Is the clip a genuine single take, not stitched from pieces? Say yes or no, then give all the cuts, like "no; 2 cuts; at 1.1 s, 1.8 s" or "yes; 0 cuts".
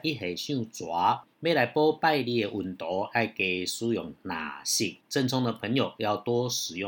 no; 2 cuts; at 1.3 s, 5.0 s